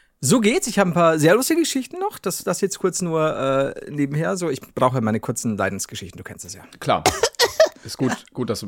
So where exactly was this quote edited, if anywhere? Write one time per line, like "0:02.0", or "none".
none